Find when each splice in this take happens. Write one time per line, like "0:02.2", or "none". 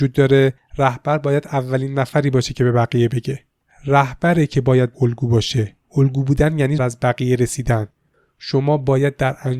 0:04.9
0:05.8
0:06.8